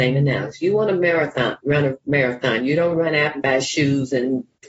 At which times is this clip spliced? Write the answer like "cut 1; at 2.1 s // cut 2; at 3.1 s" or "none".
none